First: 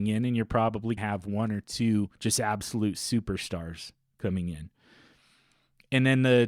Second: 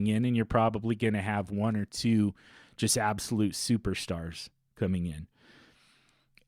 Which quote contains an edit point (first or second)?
first